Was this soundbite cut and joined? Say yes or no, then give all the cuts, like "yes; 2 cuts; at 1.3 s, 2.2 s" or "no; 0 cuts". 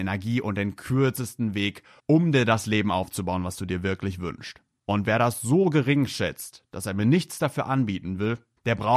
no; 0 cuts